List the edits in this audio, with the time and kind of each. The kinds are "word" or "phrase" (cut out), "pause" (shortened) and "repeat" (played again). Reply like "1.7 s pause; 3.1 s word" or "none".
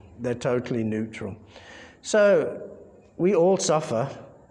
none